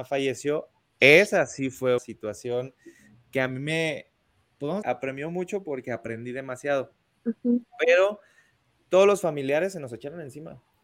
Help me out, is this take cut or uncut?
cut